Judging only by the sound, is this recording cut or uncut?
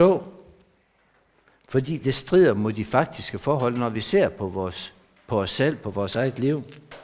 uncut